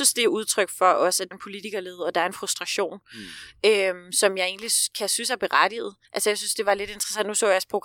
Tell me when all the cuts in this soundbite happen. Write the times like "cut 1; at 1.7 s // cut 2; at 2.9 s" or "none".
cut 1; at 1.3 s // cut 2; at 6.0 s